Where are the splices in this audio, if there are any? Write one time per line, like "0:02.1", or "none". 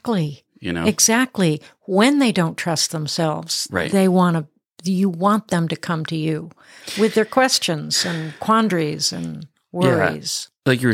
none